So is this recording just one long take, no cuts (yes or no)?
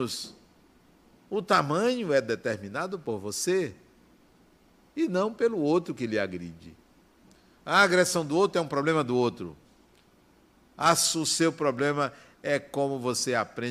yes